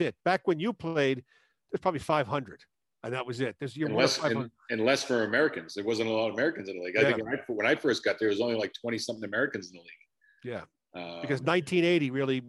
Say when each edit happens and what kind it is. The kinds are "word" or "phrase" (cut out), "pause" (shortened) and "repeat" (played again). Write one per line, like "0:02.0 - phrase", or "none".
none